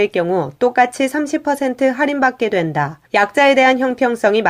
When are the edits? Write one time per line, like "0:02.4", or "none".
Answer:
0:03.1